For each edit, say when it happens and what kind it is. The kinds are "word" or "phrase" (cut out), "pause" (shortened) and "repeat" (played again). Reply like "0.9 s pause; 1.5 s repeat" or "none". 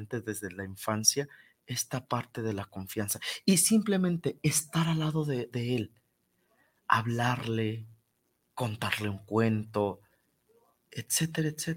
none